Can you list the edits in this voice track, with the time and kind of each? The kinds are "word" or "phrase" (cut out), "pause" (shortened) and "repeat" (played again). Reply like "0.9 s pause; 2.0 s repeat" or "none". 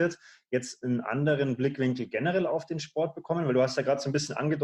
none